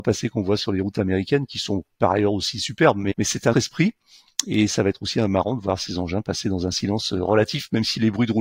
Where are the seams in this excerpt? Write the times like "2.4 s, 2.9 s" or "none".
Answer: 3.1 s, 3.5 s